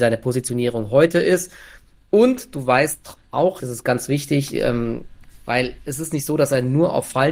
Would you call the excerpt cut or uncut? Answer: cut